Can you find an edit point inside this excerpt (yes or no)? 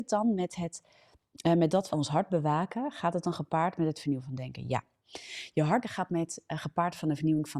yes